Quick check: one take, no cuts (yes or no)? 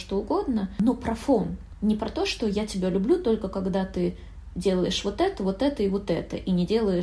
yes